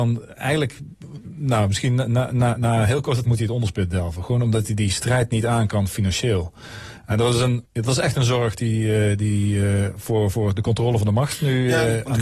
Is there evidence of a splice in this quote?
yes; 3 cuts; at 2.6 s, 3.2 s, 7.7 s

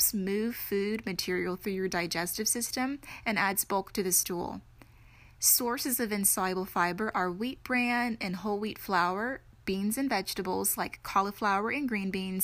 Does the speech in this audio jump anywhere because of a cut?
no; 0 cuts

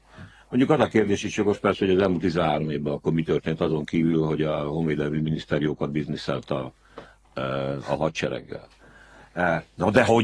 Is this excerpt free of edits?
yes; 0 cuts

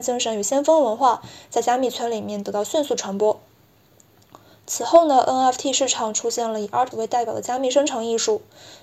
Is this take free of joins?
no; 1 cut; at 6.9 s

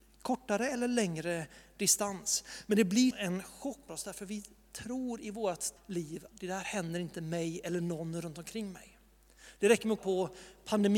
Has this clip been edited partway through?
yes; 5 cuts; at 3.1 s, 3.9 s, 5.8 s, 6.3 s, 10.0 s

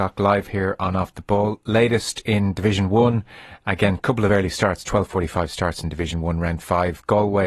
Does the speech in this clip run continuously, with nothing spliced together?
yes; 0 cuts

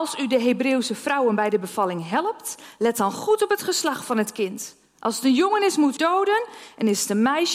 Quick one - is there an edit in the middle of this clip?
yes; 1 cut; at 6.0 s

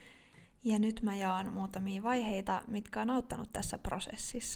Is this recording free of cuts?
yes; 0 cuts

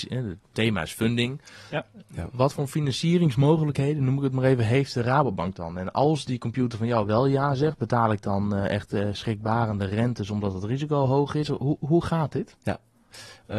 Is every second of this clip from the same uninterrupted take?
yes; 0 cuts

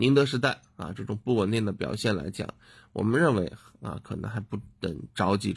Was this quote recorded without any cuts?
yes; 0 cuts

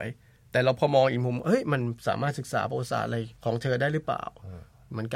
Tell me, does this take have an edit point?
yes; 1 cut; at 3.3 s

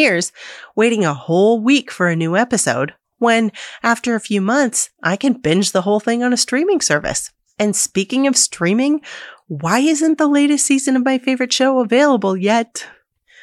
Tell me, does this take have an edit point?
no; 0 cuts

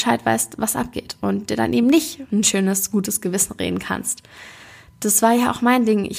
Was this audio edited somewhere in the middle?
no; 0 cuts

